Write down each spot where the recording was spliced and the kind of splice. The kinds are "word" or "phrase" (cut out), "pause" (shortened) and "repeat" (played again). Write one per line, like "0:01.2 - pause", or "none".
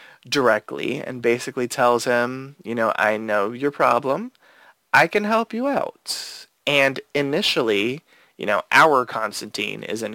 none